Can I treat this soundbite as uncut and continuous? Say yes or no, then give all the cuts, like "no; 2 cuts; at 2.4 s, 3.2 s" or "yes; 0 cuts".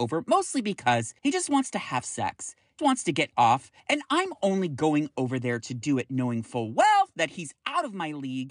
no; 3 cuts; at 1.2 s, 2.8 s, 3.8 s